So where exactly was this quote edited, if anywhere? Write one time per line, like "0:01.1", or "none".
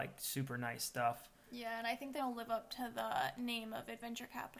0:02.2